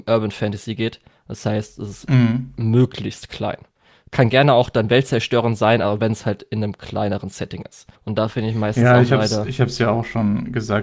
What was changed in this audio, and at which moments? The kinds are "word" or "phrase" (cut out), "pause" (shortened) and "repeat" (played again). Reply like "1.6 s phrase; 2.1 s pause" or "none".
7.9 s pause